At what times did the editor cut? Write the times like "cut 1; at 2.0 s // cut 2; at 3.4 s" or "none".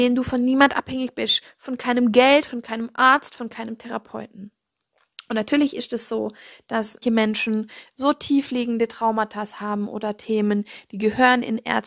cut 1; at 7.0 s